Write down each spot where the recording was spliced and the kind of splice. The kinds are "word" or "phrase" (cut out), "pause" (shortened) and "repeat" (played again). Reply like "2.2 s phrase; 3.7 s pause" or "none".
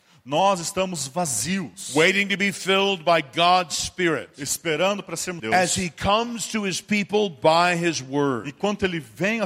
5.4 s phrase